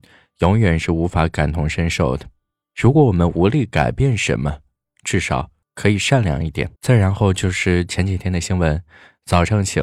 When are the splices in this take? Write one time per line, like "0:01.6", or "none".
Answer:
0:02.6
0:05.6
0:06.8